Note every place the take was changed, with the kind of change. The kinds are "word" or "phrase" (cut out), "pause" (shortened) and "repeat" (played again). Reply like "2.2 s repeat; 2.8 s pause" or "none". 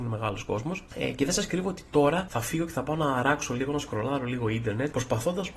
none